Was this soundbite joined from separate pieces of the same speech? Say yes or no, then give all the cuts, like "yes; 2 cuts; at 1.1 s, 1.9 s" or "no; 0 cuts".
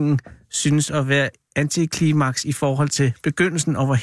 no; 0 cuts